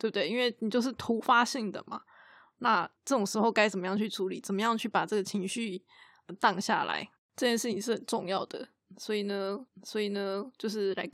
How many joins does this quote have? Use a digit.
2